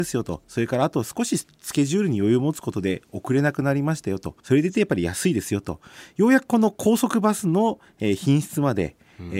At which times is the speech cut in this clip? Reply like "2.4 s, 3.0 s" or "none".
4.4 s